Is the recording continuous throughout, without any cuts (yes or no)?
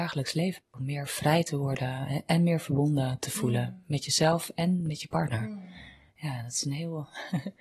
yes